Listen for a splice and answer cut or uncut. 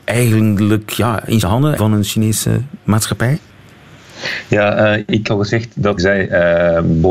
cut